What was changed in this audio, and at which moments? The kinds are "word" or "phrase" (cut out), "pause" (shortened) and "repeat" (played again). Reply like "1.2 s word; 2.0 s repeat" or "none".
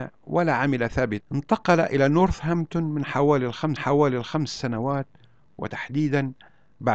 1.2 s word; 3.8 s repeat